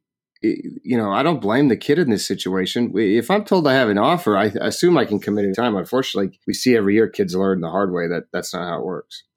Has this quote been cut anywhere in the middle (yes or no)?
yes